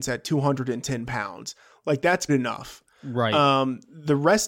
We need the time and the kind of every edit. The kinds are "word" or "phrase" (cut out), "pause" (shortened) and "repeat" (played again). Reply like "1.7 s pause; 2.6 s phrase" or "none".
2.3 s word